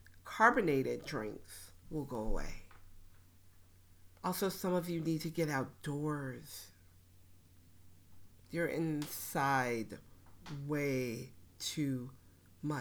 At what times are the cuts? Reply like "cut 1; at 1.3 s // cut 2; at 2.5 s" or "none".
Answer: cut 1; at 1.8 s // cut 2; at 4.1 s // cut 3; at 11.5 s